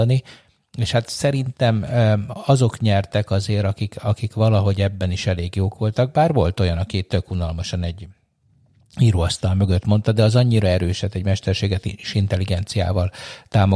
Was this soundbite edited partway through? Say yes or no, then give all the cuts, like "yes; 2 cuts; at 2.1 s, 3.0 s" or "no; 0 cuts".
no; 0 cuts